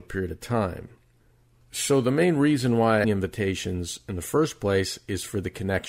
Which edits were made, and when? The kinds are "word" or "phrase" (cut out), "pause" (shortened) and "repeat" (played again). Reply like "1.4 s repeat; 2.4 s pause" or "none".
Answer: 3.0 s phrase